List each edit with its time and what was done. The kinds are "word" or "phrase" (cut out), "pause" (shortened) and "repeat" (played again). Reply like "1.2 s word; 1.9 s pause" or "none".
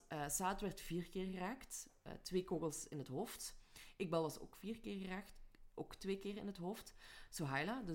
none